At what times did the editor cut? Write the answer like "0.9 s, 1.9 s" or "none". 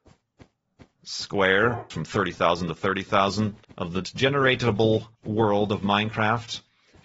1.9 s, 3.6 s, 4.0 s, 5.1 s